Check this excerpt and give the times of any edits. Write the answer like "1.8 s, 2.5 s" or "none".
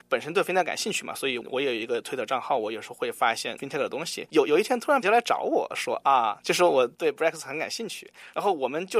5.0 s, 6.4 s